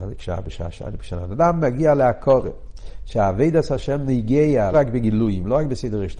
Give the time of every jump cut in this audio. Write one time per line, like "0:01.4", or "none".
0:04.7